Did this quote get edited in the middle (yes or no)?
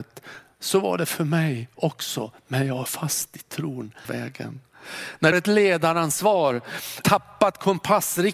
yes